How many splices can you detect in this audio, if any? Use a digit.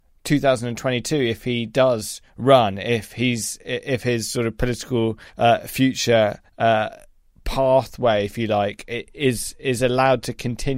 3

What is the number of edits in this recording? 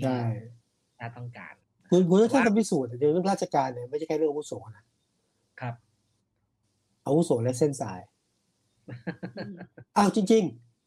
1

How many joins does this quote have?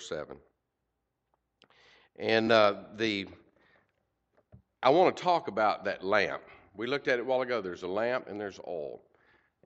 0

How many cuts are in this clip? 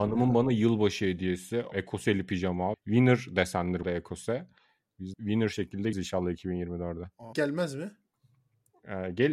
6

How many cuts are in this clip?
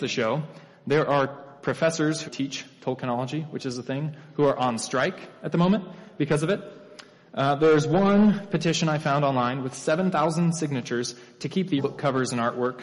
2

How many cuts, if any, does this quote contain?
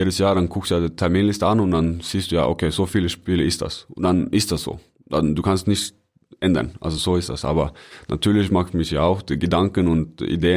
0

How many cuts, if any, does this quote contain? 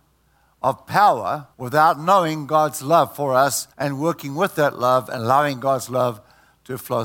2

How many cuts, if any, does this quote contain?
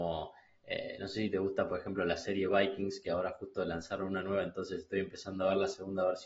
0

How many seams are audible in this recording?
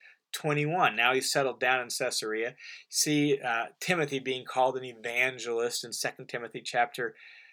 0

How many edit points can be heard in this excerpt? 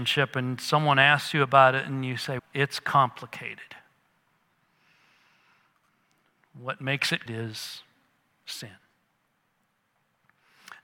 2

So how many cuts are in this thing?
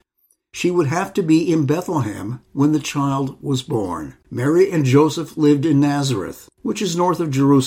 3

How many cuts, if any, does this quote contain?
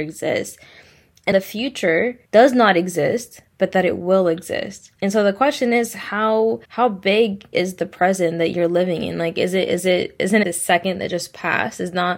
6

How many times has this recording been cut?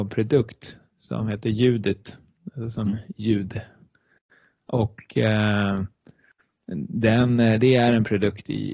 0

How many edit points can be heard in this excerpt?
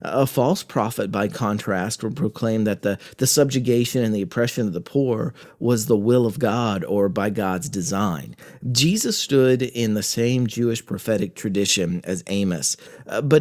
0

